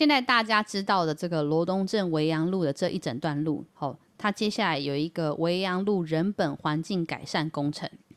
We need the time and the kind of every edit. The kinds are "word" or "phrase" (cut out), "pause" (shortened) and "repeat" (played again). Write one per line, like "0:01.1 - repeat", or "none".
0:03.7 - pause